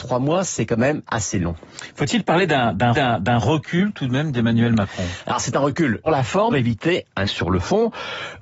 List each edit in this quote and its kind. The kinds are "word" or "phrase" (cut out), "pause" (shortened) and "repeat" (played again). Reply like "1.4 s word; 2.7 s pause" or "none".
2.9 s repeat; 6.1 s word; 6.5 s phrase; 7.2 s word